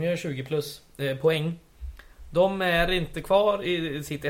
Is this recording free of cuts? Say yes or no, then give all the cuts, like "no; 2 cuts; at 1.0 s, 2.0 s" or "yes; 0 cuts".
yes; 0 cuts